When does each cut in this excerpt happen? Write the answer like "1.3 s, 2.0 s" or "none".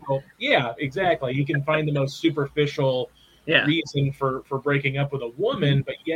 none